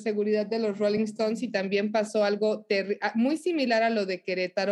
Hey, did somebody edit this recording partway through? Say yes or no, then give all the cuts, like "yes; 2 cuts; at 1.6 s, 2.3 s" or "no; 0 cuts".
no; 0 cuts